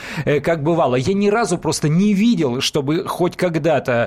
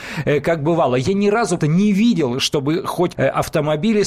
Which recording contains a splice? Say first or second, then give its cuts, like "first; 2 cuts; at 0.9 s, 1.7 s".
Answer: second; 2 cuts; at 1.6 s, 3.2 s